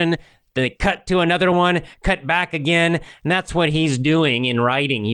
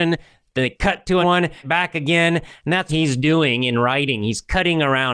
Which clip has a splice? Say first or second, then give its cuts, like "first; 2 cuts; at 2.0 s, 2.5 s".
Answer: second; 3 cuts; at 1.2 s, 1.6 s, 2.9 s